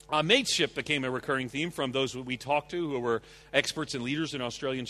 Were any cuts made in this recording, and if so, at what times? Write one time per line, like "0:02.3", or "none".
none